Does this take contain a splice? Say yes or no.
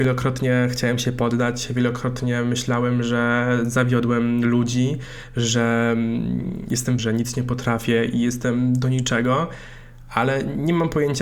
yes